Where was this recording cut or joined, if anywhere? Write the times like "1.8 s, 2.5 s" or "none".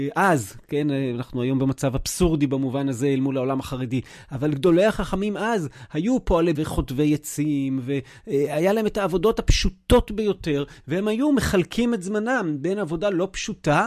6.6 s